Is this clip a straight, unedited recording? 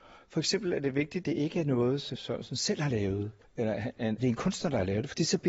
no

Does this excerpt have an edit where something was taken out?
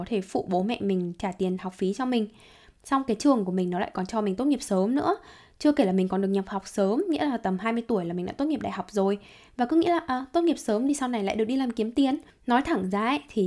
no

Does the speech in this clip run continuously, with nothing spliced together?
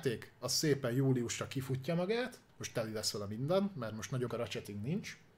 no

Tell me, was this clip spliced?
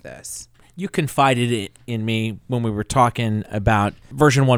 no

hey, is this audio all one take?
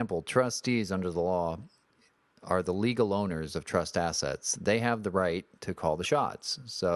yes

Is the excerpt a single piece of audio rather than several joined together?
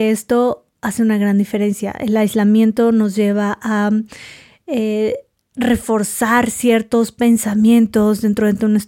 yes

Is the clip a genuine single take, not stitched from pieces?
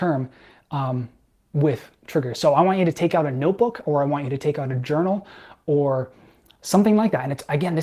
yes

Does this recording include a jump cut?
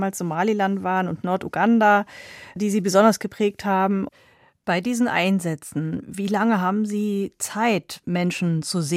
no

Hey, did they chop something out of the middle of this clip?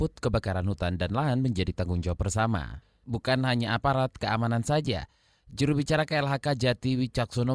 no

